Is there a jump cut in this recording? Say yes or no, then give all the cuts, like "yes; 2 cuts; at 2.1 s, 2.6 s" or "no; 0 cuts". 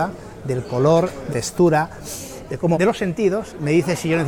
yes; 2 cuts; at 1.3 s, 2.7 s